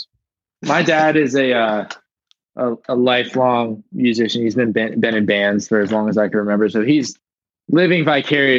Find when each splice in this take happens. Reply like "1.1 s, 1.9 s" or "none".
none